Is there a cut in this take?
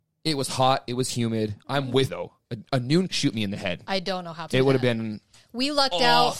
yes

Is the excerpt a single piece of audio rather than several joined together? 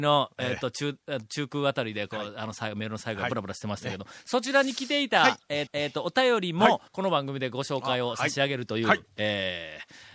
no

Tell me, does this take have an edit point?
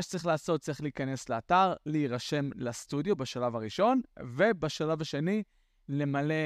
no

